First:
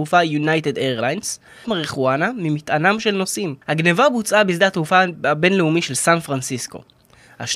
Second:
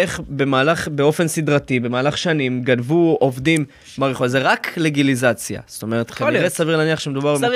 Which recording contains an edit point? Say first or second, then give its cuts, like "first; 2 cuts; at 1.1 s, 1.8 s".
first; 2 cuts; at 1.6 s, 3.6 s